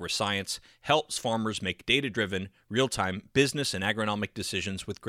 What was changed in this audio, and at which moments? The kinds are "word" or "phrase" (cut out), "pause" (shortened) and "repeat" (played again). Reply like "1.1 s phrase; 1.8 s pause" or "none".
none